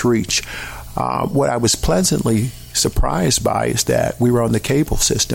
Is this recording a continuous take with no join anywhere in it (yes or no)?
no